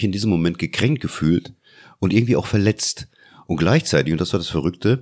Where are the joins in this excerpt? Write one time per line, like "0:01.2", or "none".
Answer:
none